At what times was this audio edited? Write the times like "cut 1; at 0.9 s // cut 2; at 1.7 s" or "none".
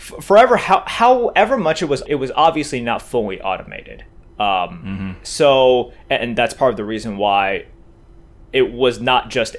cut 1; at 2.1 s